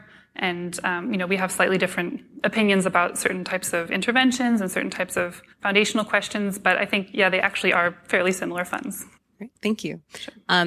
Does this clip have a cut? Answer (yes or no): yes